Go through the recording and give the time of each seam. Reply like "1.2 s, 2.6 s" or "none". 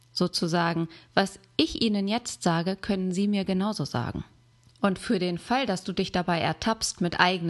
4.5 s